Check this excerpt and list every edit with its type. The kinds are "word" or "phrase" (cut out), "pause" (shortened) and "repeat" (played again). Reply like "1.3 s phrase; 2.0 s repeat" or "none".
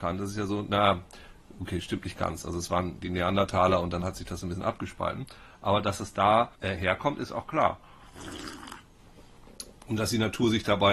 6.5 s pause